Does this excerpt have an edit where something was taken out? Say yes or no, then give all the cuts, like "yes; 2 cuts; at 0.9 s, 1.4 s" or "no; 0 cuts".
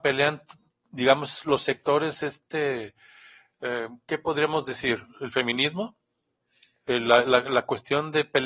no; 0 cuts